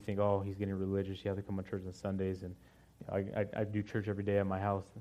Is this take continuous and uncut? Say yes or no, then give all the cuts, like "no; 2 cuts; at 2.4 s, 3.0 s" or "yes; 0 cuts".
yes; 0 cuts